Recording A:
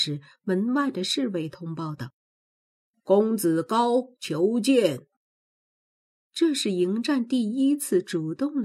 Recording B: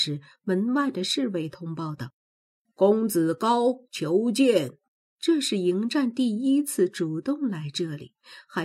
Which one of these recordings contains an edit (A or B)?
B